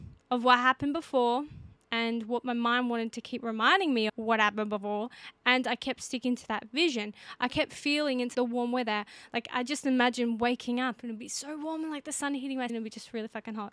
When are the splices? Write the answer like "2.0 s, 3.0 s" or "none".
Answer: 4.1 s, 8.3 s, 12.7 s